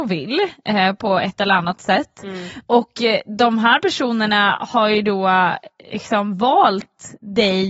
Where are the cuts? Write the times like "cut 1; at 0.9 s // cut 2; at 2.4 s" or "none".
none